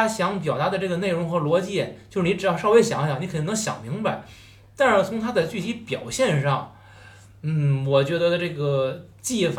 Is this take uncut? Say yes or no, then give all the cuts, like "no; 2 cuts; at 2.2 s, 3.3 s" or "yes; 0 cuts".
yes; 0 cuts